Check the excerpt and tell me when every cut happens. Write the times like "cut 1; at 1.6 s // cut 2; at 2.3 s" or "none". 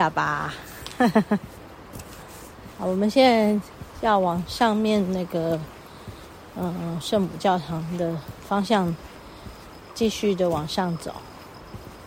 none

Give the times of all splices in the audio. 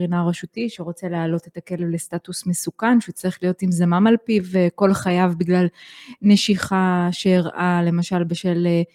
none

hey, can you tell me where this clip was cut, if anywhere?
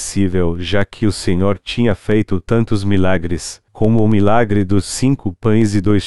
cut 1; at 3.7 s

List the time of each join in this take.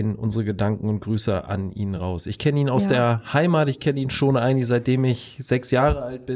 none

